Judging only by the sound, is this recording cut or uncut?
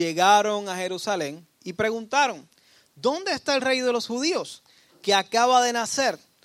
uncut